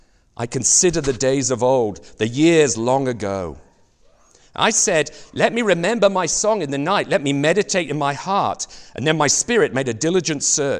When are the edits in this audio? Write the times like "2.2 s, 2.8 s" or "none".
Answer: none